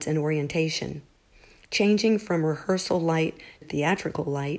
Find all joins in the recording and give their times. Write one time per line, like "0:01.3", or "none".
0:03.6